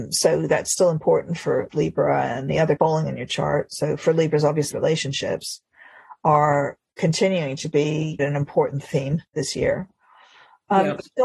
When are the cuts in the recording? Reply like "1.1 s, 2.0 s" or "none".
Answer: 1.7 s, 2.8 s, 4.7 s, 8.2 s, 9.3 s